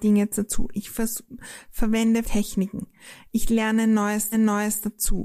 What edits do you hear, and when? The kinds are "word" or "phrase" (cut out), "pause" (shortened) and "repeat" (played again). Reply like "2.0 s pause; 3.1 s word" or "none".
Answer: 2.2 s word; 4.3 s repeat